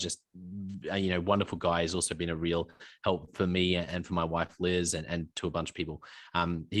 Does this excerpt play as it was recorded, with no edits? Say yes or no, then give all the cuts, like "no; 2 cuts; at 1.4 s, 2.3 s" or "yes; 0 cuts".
yes; 0 cuts